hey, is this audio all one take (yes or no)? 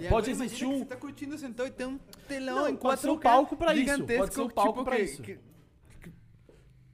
yes